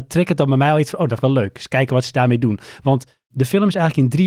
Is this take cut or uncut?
cut